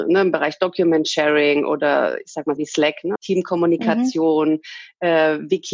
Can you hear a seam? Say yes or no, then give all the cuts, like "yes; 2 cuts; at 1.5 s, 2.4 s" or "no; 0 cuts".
yes; 2 cuts; at 2.6 s, 3.2 s